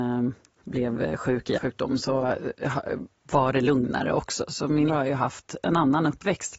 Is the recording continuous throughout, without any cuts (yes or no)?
no